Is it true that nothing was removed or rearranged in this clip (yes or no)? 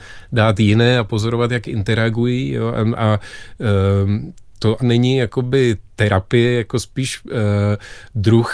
no